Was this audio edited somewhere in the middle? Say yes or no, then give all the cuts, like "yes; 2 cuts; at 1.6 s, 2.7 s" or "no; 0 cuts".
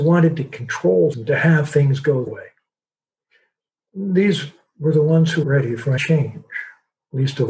yes; 4 cuts; at 1.1 s, 2.3 s, 5.4 s, 6.0 s